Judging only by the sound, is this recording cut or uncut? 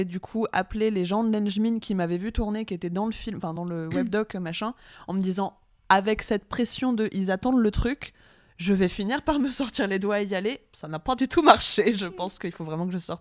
uncut